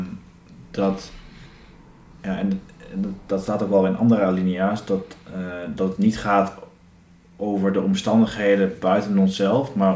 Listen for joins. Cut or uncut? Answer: uncut